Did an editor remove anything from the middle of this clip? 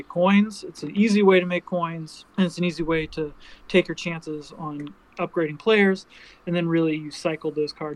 yes; 1 cut; at 2.3 s

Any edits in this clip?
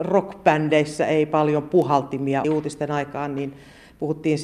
yes; 1 cut; at 2.4 s

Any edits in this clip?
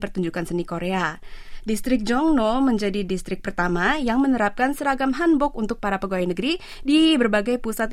no; 0 cuts

